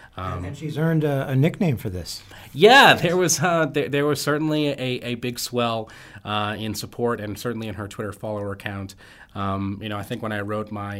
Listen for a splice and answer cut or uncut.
uncut